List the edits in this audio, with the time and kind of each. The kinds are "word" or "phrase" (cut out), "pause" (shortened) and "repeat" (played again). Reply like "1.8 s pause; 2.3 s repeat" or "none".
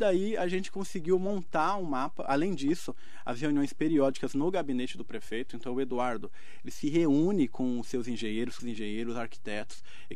8.6 s word